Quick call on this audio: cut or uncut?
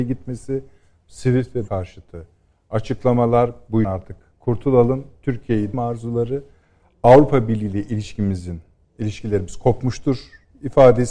cut